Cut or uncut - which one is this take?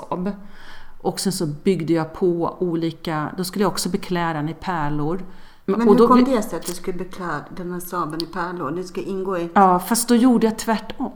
uncut